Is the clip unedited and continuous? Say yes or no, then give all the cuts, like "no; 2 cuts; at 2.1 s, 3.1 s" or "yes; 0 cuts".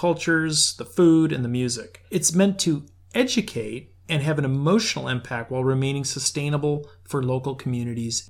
no; 1 cut; at 2.1 s